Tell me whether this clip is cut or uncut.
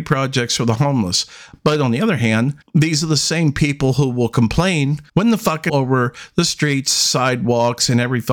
cut